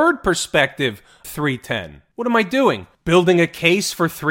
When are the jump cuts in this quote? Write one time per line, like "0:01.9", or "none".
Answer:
0:01.2